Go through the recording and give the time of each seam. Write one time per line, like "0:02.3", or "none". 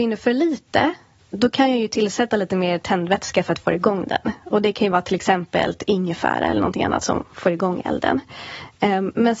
none